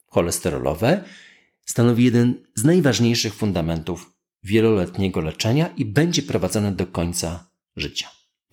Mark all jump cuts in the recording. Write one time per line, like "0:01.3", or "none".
none